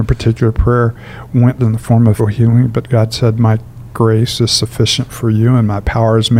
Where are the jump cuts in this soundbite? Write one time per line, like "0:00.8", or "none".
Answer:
0:01.6
0:02.2